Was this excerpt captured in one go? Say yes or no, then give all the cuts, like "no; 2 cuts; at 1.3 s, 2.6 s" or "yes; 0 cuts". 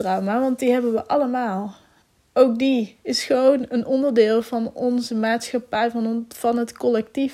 yes; 0 cuts